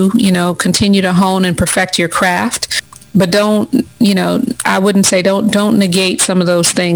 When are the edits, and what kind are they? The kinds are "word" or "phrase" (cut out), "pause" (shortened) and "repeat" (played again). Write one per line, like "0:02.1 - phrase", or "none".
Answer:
0:04.6 - word